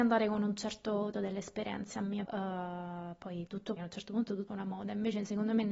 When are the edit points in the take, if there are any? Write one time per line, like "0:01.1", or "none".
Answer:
0:01.1
0:02.2
0:03.8
0:04.5